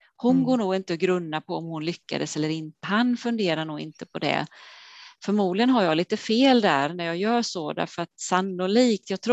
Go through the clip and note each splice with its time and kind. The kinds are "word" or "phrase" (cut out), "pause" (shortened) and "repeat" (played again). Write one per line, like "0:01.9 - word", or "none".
0:02.8 - word